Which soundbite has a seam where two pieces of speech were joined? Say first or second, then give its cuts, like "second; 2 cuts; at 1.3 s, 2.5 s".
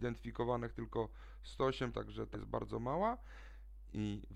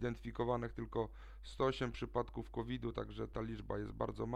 first; 2 cuts; at 1.9 s, 2.3 s